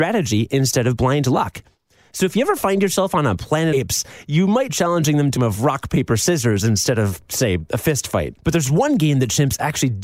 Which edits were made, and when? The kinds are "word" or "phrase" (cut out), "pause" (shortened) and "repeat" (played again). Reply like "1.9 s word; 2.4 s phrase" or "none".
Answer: 3.7 s phrase; 4.7 s word; 5.4 s phrase; 8.4 s pause